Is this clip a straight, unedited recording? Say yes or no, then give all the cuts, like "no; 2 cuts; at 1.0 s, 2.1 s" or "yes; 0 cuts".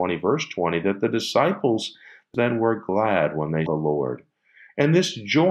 no; 2 cuts; at 2.3 s, 3.7 s